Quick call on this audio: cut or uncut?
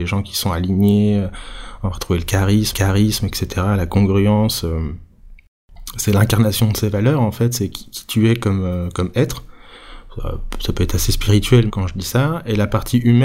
cut